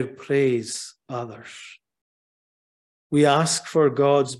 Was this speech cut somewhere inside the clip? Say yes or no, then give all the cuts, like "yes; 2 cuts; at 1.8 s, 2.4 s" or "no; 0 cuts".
no; 0 cuts